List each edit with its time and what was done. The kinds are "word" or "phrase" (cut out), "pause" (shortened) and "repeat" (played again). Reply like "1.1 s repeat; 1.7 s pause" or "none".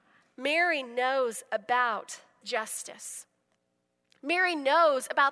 2.4 s word